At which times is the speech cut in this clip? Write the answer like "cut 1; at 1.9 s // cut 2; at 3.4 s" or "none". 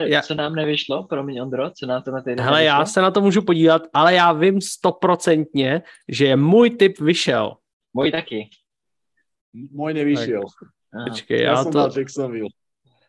none

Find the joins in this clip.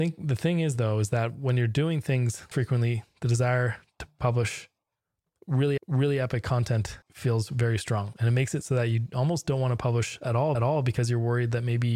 cut 1; at 2.5 s // cut 2; at 5.8 s // cut 3; at 7.0 s // cut 4; at 10.5 s

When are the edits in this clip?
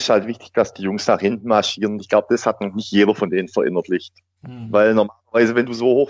none

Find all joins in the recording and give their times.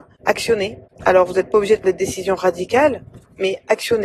cut 1; at 1.8 s

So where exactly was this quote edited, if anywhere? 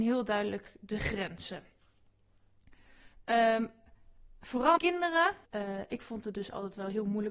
cut 1; at 4.8 s // cut 2; at 5.5 s

